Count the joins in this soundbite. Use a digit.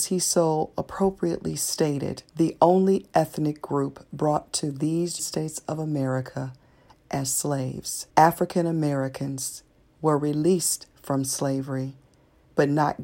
3